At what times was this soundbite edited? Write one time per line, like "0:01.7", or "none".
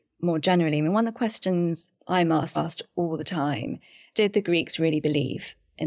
0:02.0
0:02.5
0:04.1